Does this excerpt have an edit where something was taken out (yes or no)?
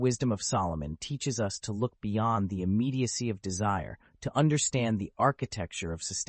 no